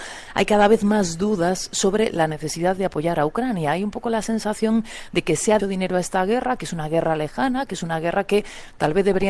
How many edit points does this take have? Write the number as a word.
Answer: one